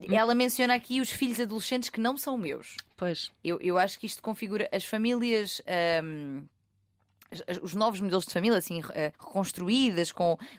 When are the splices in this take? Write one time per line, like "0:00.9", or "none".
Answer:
0:09.1